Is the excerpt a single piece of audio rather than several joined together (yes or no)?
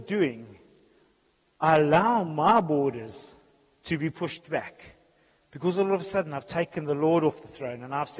yes